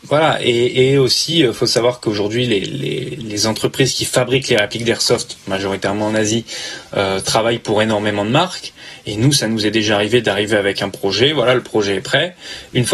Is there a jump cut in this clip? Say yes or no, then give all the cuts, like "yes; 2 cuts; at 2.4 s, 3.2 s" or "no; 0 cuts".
no; 0 cuts